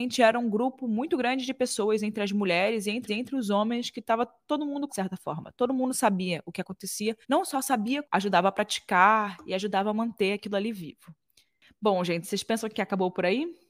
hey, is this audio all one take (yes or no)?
no